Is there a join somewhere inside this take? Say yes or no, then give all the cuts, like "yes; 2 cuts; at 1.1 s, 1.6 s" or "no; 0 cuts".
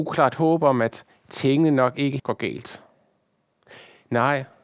yes; 1 cut; at 2.2 s